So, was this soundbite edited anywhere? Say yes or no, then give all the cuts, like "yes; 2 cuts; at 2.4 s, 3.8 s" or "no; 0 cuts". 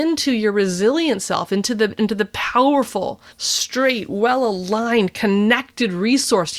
yes; 1 cut; at 3.3 s